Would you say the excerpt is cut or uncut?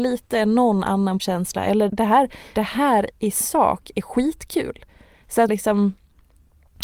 cut